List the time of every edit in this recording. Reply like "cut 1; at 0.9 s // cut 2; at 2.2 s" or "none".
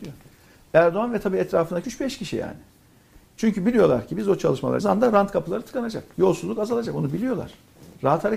cut 1; at 1.8 s // cut 2; at 4.8 s